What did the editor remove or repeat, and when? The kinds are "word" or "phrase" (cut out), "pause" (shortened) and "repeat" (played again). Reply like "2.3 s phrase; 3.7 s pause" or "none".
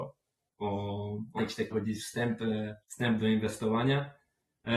1.4 s word; 1.7 s word; 2.8 s pause

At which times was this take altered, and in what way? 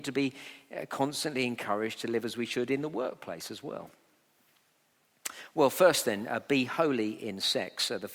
none

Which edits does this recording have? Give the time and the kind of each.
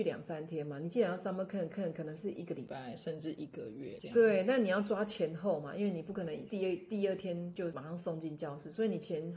1.7 s repeat

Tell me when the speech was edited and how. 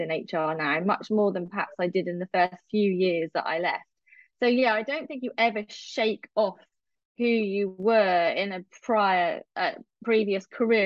none

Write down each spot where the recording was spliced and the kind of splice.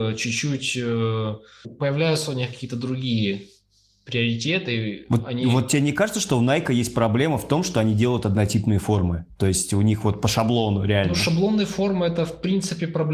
1.6 s word

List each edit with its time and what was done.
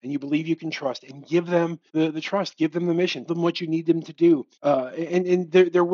1.9 s pause; 3.3 s word; 4.5 s pause

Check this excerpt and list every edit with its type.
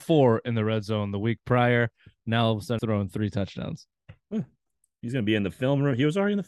2.8 s word

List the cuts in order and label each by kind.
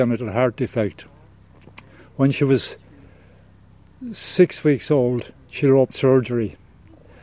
5.9 s word

